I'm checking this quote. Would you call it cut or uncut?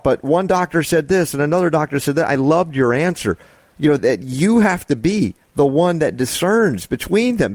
cut